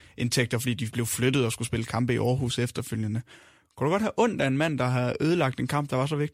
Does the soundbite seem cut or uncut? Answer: uncut